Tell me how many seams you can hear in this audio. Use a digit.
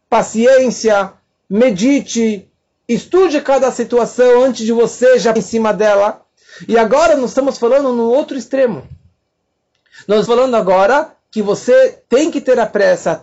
3